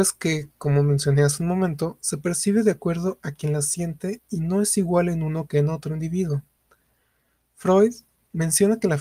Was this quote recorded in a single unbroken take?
yes; 0 cuts

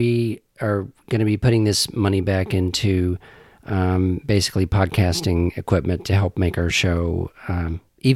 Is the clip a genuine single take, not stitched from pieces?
yes; 0 cuts

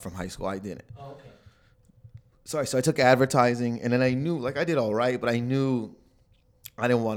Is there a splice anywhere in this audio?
no; 0 cuts

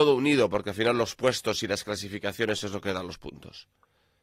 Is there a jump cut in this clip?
no; 0 cuts

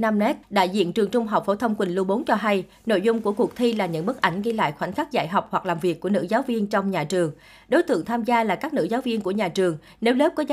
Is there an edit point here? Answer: no; 0 cuts

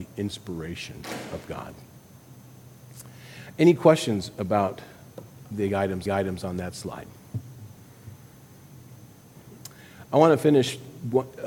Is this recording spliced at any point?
yes; 1 cut; at 6.1 s

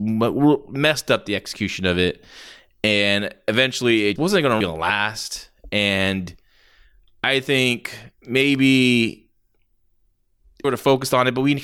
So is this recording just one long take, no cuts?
no; 3 cuts; at 4.2 s, 4.6 s, 10.6 s

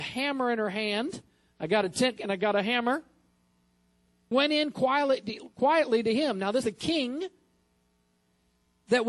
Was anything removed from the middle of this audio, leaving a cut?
yes; 3 cuts; at 2.2 s, 4.3 s, 6.6 s

